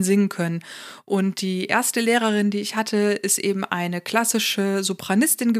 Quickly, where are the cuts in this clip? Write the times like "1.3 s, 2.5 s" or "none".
none